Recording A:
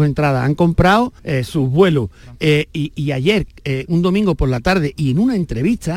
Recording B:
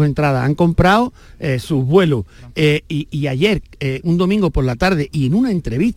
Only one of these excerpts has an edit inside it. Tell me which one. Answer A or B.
A